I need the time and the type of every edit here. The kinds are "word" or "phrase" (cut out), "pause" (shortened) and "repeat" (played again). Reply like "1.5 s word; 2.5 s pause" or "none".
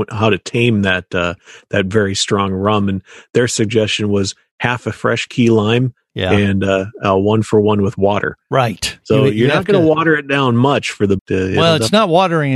11.2 s phrase